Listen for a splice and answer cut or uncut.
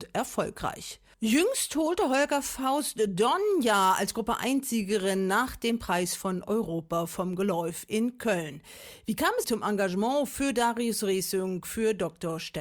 cut